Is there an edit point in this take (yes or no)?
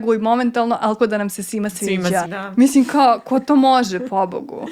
yes